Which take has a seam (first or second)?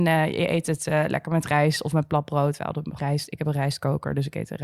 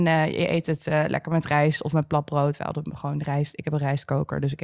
first